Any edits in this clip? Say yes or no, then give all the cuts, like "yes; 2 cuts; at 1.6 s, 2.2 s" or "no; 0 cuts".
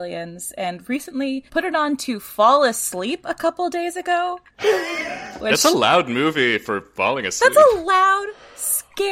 yes; 1 cut; at 1.5 s